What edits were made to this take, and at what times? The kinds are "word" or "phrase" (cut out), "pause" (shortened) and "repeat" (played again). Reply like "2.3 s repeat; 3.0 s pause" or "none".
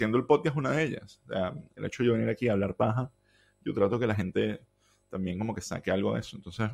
none